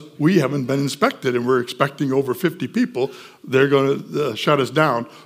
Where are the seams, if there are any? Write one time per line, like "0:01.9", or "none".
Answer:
none